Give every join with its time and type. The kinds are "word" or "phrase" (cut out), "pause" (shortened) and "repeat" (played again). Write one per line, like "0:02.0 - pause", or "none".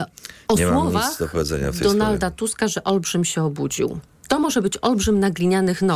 none